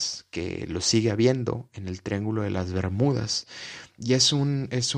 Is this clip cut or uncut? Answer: uncut